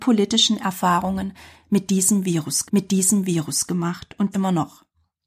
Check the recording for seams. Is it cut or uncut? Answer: cut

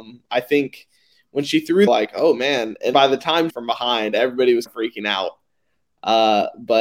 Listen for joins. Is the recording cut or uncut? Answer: cut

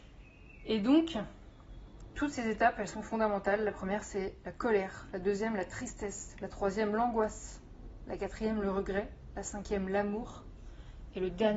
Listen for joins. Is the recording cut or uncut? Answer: uncut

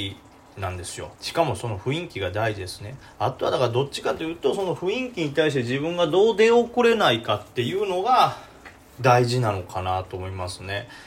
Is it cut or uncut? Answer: cut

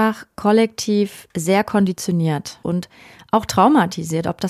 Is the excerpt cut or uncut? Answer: uncut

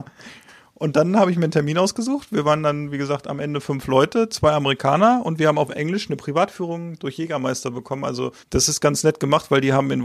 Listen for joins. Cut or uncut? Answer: cut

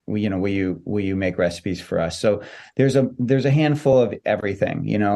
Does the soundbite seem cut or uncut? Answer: uncut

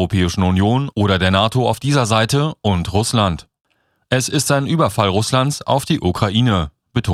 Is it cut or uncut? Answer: uncut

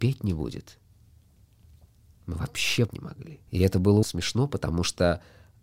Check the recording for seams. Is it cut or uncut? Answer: cut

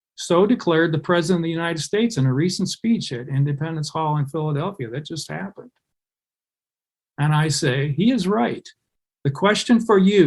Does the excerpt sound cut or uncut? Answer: uncut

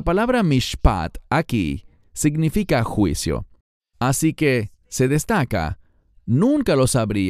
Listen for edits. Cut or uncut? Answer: uncut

